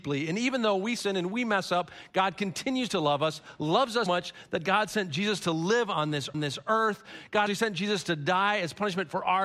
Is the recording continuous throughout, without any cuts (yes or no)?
no